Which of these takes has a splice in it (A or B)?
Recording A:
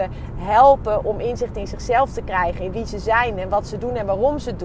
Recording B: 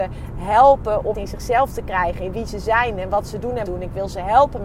B